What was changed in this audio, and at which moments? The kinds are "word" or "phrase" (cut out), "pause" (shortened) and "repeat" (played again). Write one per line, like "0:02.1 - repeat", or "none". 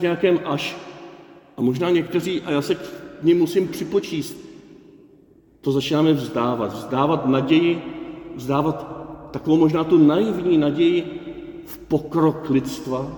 none